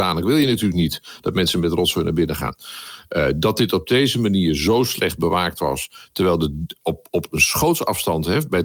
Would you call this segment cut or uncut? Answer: uncut